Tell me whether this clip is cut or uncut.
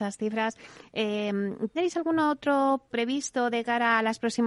cut